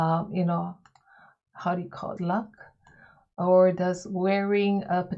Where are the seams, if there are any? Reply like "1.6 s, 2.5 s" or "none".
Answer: 2.2 s